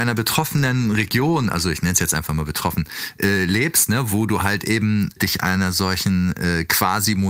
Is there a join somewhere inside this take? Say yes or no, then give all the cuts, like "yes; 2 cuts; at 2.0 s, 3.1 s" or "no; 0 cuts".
no; 0 cuts